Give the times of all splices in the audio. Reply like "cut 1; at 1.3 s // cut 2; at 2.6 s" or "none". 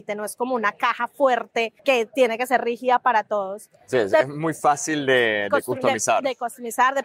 cut 1; at 1.8 s